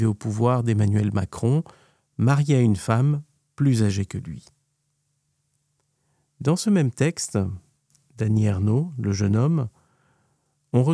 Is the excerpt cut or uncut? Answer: uncut